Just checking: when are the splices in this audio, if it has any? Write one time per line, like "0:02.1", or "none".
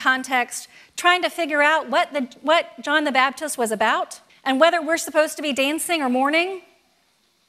0:04.3